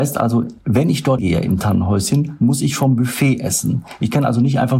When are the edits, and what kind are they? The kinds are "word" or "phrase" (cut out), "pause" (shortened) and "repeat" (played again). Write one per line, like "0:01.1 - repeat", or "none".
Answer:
0:01.2 - word